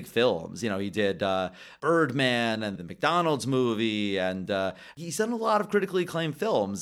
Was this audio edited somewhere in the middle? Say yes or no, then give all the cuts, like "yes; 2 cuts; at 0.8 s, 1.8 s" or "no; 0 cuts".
yes; 1 cut; at 2.8 s